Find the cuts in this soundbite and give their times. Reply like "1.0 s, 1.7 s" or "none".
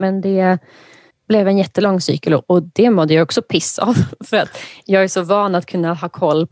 1.1 s